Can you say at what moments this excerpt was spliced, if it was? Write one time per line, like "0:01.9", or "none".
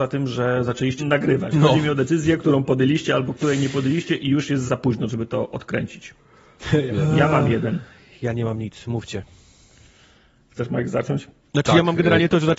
0:01.0
0:04.6
0:06.9